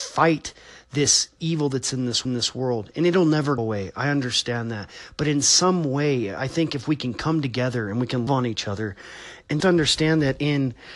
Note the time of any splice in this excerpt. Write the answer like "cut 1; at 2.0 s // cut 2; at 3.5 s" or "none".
cut 1; at 2.2 s // cut 2; at 3.6 s // cut 3; at 8.3 s // cut 4; at 9.6 s